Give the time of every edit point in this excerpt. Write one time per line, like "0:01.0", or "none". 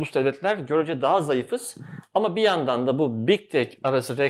none